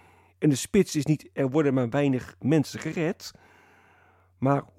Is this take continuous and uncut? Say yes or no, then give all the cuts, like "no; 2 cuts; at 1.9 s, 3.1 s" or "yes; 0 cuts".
yes; 0 cuts